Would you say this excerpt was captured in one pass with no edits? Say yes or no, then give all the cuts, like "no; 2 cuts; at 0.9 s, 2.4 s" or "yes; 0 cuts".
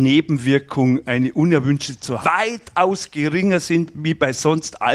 no; 1 cut; at 2.2 s